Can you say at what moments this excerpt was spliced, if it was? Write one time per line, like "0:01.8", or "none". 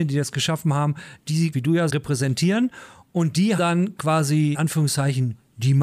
0:01.5
0:01.9
0:03.6
0:04.5